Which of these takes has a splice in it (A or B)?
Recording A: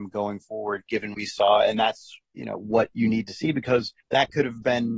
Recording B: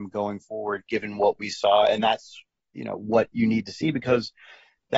A